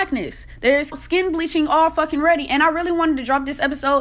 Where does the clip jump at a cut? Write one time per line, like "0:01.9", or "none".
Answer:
0:00.9